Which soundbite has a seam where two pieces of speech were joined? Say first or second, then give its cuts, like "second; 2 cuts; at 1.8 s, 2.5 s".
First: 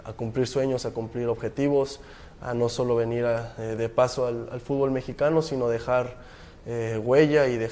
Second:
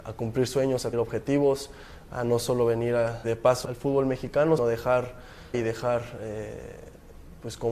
second; 5 cuts; at 0.9 s, 3.2 s, 3.6 s, 4.6 s, 5.5 s